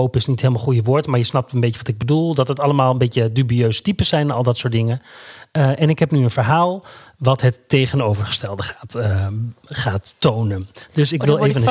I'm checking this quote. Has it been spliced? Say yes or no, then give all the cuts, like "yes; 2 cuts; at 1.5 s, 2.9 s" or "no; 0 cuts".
no; 0 cuts